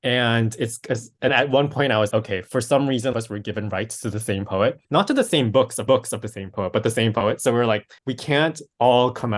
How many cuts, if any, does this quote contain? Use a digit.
6